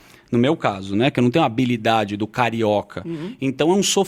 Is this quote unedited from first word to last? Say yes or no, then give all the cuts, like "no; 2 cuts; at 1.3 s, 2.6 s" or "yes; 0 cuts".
yes; 0 cuts